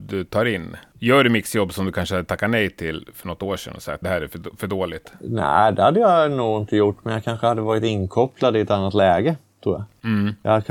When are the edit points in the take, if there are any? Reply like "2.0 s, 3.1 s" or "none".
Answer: 4.0 s